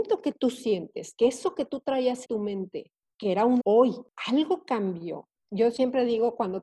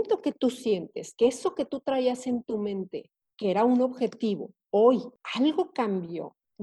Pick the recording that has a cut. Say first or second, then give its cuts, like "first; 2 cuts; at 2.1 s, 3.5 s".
first; 2 cuts; at 2.2 s, 3.6 s